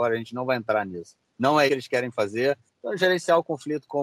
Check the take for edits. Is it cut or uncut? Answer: cut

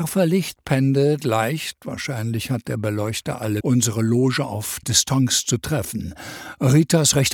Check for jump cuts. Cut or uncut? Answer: cut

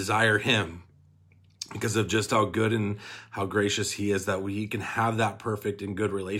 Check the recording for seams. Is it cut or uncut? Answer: uncut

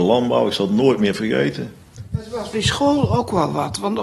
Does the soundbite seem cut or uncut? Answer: cut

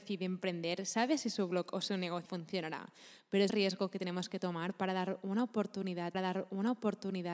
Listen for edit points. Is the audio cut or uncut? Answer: cut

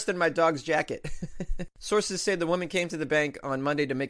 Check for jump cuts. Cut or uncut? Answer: uncut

